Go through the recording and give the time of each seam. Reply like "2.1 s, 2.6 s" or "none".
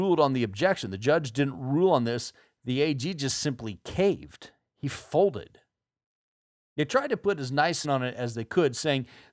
7.8 s